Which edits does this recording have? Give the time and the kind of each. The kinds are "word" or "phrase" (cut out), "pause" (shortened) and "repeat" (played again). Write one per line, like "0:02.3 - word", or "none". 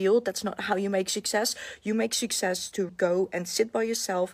0:02.9 - word